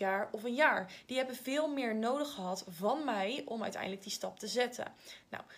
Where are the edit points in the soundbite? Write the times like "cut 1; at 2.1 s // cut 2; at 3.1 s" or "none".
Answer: none